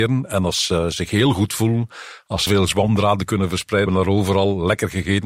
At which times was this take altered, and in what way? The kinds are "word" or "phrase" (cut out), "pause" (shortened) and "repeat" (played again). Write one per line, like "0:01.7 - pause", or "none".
0:02.5 - word
0:03.9 - word